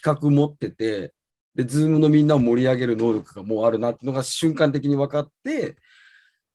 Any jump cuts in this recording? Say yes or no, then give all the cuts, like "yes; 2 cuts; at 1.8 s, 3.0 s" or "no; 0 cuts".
no; 0 cuts